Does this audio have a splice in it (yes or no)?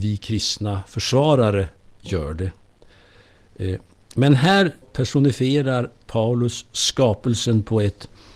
yes